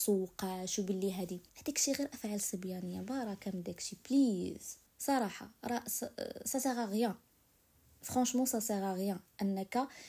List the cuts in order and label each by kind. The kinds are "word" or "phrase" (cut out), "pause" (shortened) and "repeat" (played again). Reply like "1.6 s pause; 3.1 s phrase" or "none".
1.5 s pause; 4.9 s pause